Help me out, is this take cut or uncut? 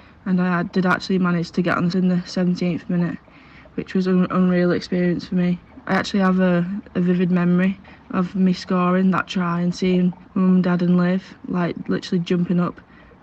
cut